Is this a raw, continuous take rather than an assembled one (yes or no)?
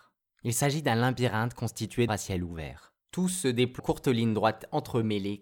no